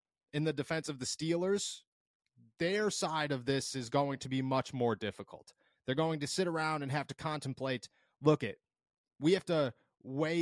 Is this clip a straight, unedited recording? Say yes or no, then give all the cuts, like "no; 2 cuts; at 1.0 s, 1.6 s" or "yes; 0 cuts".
yes; 0 cuts